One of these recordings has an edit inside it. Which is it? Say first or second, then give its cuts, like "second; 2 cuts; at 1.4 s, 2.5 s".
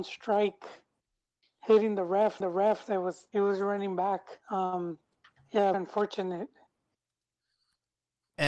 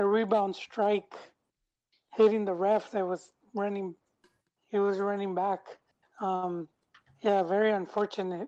first; 4 cuts; at 2.4 s, 3.3 s, 4.4 s, 5.7 s